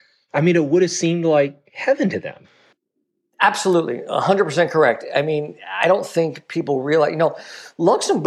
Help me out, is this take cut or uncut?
uncut